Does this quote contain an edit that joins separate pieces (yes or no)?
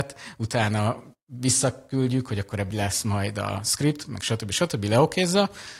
yes